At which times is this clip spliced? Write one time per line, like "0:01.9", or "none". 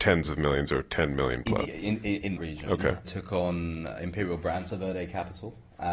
0:01.7
0:02.4
0:03.0
0:04.7